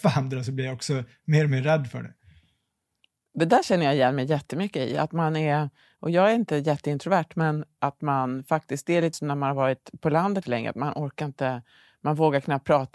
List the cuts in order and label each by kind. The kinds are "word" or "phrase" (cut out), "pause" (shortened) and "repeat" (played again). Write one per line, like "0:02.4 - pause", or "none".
0:07.8 - word
0:09.1 - word
0:10.4 - word